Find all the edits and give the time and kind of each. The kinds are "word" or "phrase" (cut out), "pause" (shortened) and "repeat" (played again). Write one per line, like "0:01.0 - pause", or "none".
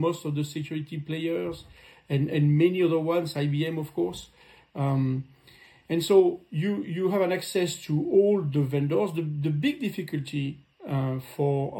none